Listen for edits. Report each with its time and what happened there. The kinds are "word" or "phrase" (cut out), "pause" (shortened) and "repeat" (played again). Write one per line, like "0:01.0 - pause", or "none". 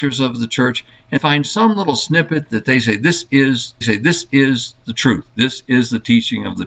0:01.2 - word
0:03.8 - repeat